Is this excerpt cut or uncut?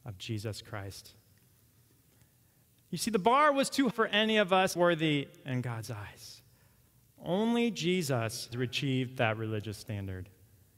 cut